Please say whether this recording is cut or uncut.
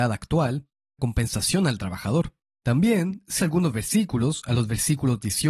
cut